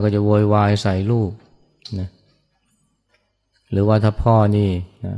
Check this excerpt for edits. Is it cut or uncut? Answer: uncut